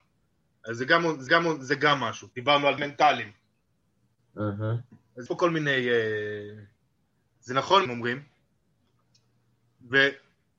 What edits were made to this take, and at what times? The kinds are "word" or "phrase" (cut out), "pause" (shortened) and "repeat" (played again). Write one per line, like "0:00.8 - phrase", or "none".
0:01.3 - repeat
0:02.3 - pause
0:02.8 - word
0:05.3 - word
0:07.9 - phrase